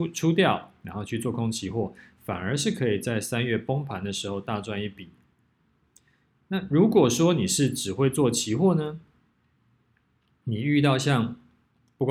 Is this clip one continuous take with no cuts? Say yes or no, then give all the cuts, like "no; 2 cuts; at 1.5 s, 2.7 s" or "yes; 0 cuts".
yes; 0 cuts